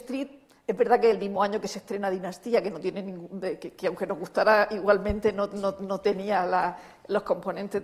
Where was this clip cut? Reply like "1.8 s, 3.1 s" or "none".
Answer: none